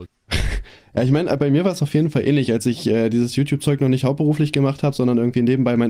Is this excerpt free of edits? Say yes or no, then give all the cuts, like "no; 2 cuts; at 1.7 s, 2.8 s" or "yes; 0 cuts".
yes; 0 cuts